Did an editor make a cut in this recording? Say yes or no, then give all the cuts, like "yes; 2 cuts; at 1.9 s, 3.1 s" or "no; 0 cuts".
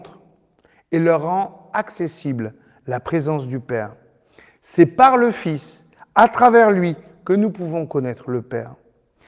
no; 0 cuts